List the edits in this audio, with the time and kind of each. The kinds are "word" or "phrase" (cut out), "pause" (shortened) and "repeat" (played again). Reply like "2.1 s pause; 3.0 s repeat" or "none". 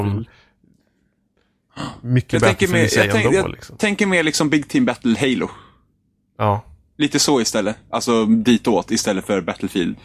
none